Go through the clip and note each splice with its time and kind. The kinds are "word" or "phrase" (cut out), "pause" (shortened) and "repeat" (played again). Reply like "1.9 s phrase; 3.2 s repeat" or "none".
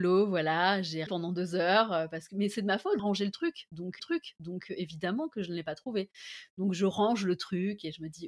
1.1 s word; 3.0 s phrase; 4.0 s repeat